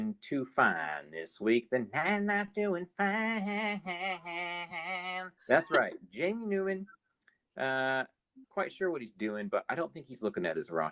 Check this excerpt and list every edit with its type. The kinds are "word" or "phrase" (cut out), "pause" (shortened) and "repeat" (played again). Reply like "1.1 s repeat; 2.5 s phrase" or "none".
5.4 s pause; 8.4 s word